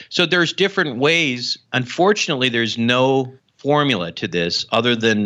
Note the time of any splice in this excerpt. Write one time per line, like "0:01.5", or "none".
0:01.6
0:03.4